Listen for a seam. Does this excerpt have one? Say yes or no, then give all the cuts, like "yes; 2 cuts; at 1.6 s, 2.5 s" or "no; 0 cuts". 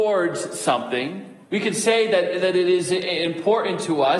yes; 1 cut; at 1.4 s